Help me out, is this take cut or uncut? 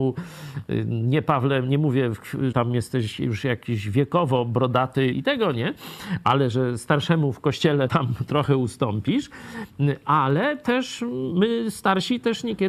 cut